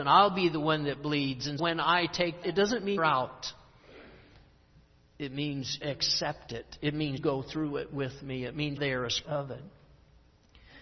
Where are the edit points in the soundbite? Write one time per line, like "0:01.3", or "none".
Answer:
0:01.6
0:02.4
0:03.0
0:05.8
0:07.2
0:08.8
0:09.2